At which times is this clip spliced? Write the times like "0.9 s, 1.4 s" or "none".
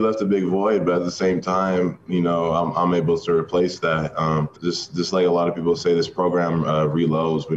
4.6 s